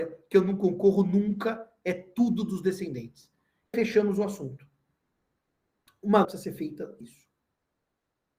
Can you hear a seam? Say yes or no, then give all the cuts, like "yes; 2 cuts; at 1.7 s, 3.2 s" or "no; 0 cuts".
yes; 3 cuts; at 3.7 s, 6.2 s, 7.0 s